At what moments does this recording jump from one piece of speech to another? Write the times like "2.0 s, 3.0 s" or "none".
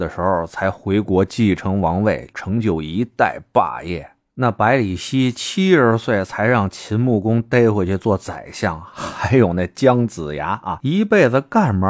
2.3 s